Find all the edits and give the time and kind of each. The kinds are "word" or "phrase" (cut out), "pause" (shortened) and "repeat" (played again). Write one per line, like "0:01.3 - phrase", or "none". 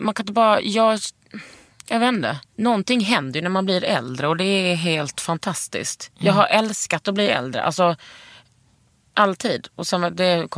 0:02.4 - pause